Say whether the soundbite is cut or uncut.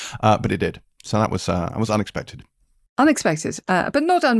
uncut